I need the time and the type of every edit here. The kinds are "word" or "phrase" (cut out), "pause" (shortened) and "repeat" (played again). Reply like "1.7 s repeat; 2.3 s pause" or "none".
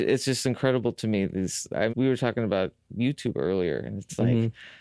1.9 s word